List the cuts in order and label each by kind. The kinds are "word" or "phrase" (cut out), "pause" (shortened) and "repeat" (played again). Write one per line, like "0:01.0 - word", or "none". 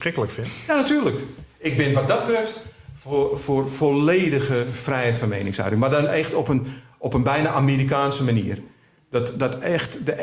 none